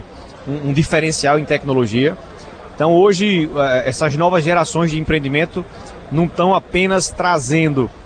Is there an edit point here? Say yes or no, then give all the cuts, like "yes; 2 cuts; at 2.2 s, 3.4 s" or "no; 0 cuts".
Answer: no; 0 cuts